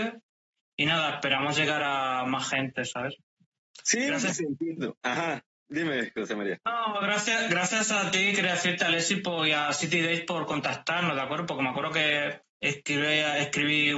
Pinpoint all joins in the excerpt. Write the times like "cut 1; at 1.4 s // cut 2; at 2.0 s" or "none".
none